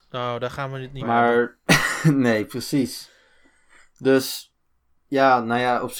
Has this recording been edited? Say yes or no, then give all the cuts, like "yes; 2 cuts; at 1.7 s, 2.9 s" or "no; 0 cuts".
yes; 1 cut; at 1.0 s